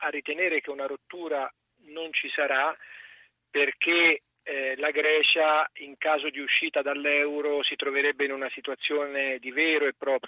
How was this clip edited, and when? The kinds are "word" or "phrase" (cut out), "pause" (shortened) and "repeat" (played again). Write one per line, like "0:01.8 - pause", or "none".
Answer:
none